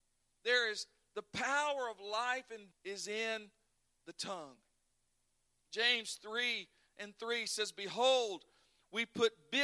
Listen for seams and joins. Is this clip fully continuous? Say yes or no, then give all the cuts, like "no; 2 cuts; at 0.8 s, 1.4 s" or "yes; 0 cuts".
no; 1 cut; at 2.7 s